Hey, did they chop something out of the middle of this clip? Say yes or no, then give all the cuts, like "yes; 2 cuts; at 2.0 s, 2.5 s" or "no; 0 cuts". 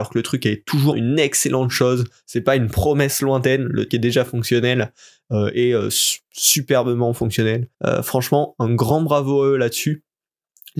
yes; 3 cuts; at 0.9 s, 3.9 s, 7.7 s